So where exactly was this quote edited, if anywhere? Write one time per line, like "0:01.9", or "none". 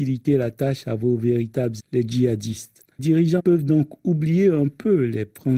0:01.8
0:03.0
0:03.4